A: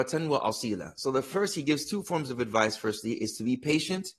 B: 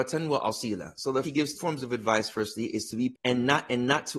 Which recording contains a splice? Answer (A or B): B